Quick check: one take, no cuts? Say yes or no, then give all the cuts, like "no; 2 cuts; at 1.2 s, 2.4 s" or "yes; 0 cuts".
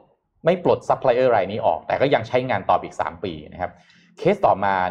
yes; 0 cuts